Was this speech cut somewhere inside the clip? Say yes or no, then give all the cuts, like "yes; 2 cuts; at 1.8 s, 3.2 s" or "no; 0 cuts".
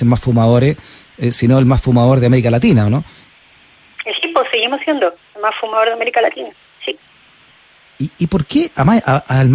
no; 0 cuts